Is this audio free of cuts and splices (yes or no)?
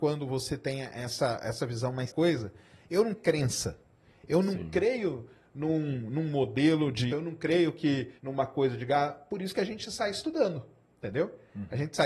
no